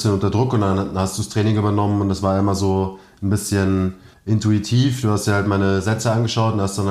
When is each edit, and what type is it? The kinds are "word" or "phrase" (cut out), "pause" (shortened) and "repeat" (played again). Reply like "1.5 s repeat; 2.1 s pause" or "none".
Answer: 4.1 s pause